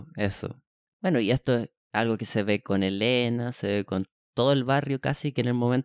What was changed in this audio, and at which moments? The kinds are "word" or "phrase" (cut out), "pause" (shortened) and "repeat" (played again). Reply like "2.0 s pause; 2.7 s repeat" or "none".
none

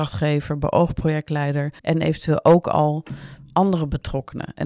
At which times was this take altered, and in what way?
1.8 s pause

